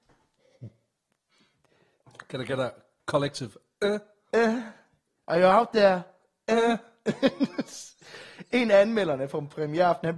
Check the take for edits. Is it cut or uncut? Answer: uncut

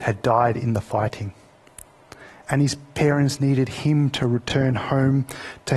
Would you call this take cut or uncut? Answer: uncut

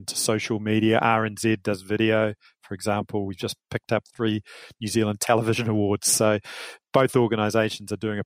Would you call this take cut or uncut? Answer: uncut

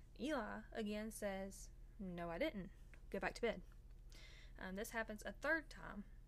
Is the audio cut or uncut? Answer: uncut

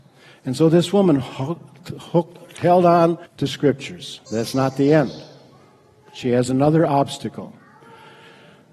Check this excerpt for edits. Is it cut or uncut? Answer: cut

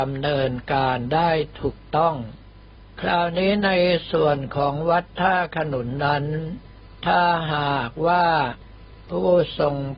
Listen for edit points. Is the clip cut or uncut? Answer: uncut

